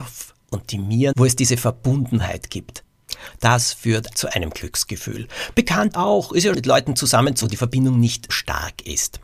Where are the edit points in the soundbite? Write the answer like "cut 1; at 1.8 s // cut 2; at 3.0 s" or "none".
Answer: cut 1; at 1.1 s // cut 2; at 4.1 s // cut 3; at 5.9 s // cut 4; at 6.5 s // cut 5; at 7.4 s // cut 6; at 8.3 s